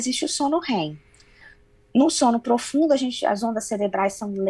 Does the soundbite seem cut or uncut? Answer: uncut